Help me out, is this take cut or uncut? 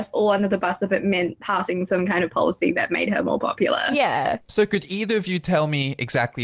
uncut